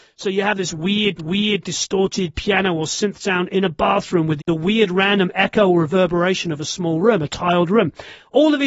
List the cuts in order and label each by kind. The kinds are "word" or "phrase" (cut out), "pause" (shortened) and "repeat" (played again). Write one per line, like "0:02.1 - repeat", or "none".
0:01.2 - repeat
0:04.4 - word